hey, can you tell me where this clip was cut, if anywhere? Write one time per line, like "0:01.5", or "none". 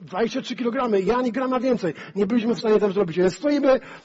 none